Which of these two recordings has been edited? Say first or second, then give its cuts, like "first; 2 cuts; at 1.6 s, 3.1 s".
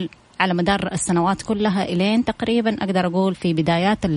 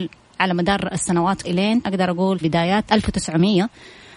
second; 4 cuts; at 1.4 s, 1.8 s, 2.4 s, 2.9 s